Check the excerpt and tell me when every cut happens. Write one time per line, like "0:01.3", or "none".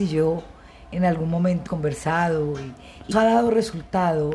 0:01.7
0:03.1